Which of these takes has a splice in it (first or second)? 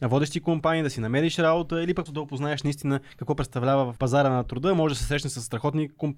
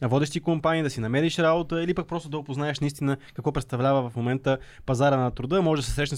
first